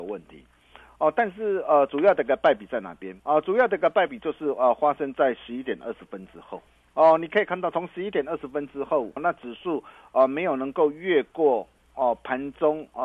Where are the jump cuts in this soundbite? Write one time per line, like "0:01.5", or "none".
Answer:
0:03.2
0:06.7
0:09.2